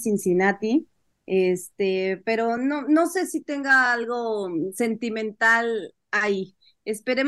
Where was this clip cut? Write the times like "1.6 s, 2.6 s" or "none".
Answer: none